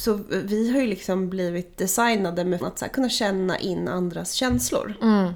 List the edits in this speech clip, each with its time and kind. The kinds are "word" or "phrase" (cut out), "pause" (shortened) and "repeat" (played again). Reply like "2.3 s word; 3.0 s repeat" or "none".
2.6 s word